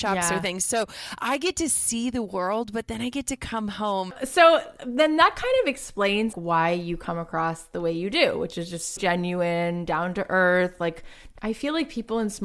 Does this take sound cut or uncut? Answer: cut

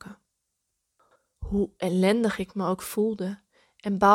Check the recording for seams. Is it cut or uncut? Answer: uncut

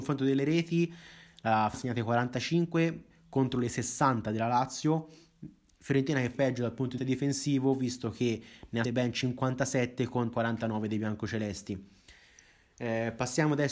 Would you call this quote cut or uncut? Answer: cut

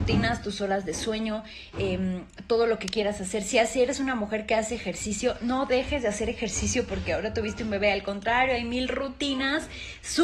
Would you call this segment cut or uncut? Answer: uncut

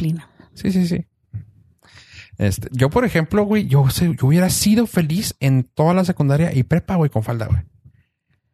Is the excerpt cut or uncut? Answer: uncut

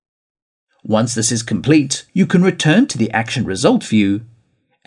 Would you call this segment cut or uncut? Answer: cut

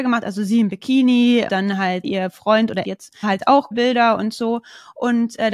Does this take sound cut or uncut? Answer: cut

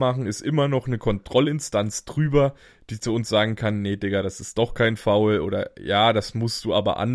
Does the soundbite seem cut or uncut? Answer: uncut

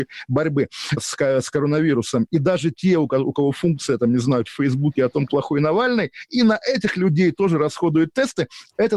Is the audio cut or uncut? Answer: cut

